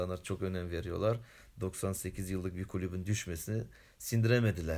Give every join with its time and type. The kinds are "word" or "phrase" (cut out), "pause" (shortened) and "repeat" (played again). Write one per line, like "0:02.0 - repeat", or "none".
none